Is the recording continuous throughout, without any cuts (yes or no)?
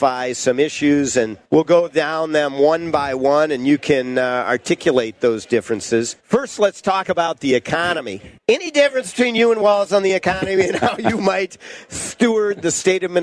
no